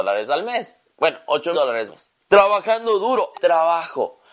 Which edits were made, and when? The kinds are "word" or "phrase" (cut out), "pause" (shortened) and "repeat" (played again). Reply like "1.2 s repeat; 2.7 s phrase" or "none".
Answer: 1.5 s word; 1.9 s word; 2.2 s pause; 3.3 s word